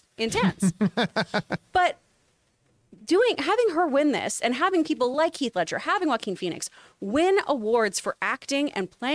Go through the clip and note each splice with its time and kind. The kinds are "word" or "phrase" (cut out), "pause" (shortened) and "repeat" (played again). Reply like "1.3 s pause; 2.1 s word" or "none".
none